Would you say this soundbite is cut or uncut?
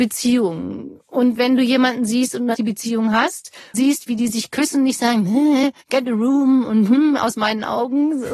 cut